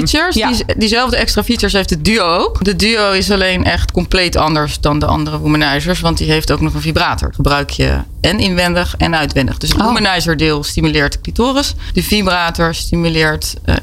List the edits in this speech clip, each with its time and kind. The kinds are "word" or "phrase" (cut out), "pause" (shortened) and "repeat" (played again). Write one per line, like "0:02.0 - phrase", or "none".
none